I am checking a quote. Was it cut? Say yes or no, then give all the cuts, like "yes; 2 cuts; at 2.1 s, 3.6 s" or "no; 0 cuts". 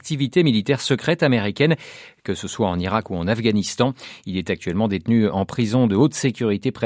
no; 0 cuts